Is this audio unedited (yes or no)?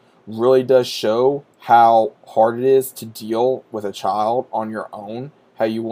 no